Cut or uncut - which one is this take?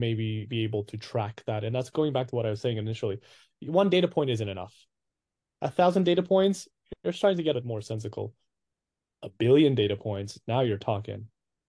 cut